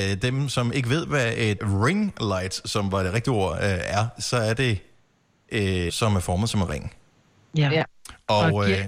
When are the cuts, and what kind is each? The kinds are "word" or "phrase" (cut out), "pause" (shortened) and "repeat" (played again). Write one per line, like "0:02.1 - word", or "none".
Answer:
0:01.6 - word
0:05.9 - phrase